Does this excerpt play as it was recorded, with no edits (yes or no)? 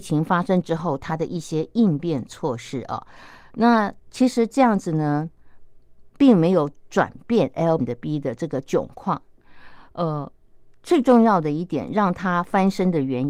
no